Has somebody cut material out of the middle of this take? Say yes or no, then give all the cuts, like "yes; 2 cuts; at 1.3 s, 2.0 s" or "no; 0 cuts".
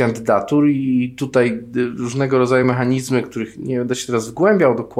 no; 0 cuts